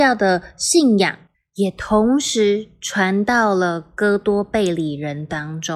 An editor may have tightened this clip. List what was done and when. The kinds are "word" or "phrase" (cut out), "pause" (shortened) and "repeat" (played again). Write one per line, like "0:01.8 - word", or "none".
0:01.3 - pause